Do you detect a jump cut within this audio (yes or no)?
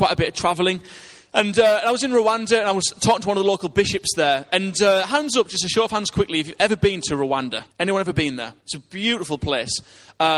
yes